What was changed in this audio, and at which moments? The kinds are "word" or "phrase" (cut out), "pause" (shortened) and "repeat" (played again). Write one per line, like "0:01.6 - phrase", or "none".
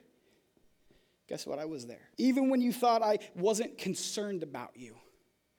0:02.1 - pause